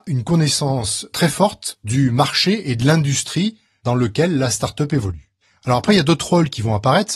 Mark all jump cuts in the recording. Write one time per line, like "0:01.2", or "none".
none